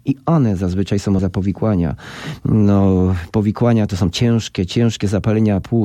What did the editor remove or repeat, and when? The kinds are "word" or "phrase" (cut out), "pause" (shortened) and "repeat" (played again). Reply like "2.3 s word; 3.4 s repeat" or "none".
1.2 s word; 3.9 s phrase